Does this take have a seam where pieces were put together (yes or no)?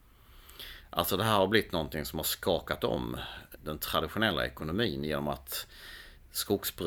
yes